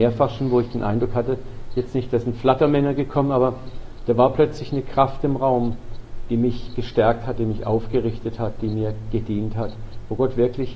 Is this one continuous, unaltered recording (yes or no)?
yes